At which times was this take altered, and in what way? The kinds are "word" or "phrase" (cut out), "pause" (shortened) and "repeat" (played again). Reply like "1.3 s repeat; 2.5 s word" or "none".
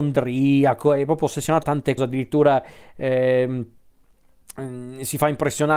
1.6 s word; 2.0 s word

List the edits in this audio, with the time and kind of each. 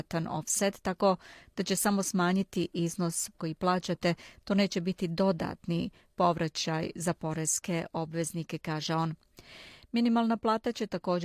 3.3 s word

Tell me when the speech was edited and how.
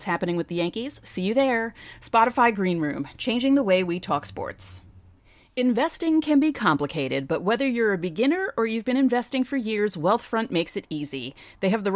none

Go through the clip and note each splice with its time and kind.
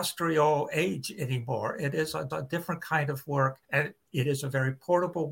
2.3 s repeat; 3.6 s pause

